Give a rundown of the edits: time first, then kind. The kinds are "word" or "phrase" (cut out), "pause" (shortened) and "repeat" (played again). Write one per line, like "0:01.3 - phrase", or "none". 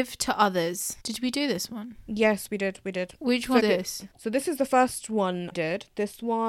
0:01.0 - pause
0:03.6 - word
0:04.1 - pause
0:05.5 - word